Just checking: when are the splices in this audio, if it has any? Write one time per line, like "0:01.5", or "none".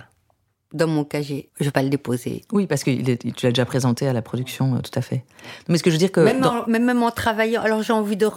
0:01.7